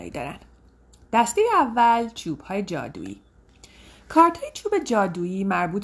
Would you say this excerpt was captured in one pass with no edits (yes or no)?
yes